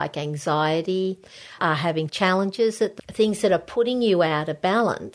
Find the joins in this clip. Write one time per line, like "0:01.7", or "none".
0:01.6
0:02.1
0:03.0

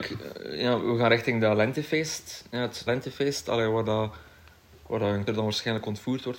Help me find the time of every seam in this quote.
0:02.9
0:05.3

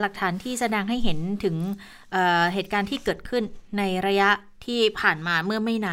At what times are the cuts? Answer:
none

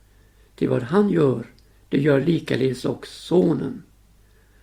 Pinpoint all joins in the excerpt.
none

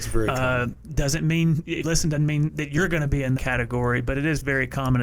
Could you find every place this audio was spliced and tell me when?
0:01.8
0:03.4

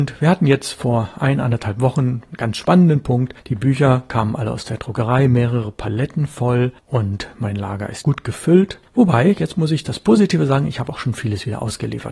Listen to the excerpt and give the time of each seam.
0:08.0

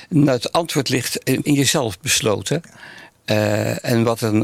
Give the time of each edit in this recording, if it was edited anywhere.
0:01.4

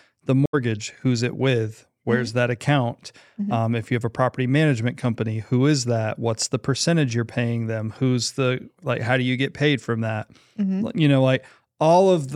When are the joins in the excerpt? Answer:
none

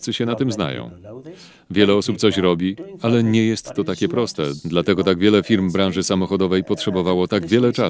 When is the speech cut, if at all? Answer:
none

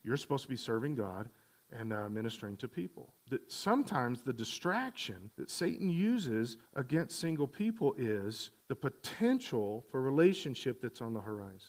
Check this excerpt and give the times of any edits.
0:03.2
0:05.3
0:06.7
0:08.6

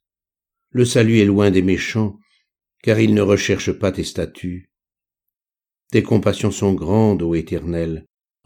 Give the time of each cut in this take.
none

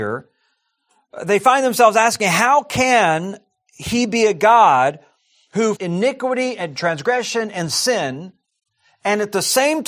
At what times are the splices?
0:05.8

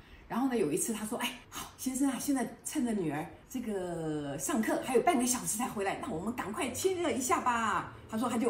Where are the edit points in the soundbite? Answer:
0:01.4
0:03.4

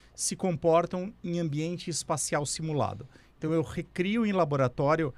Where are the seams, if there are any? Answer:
none

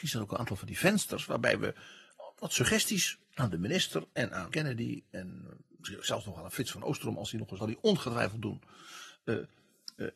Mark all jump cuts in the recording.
0:03.2
0:04.5
0:07.6

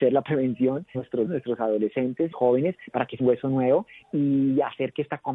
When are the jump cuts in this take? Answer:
0:00.9
0:01.3
0:02.3
0:03.2
0:04.0

